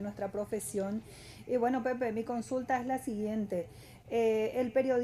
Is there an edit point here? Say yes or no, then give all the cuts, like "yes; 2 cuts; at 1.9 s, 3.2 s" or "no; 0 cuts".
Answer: no; 0 cuts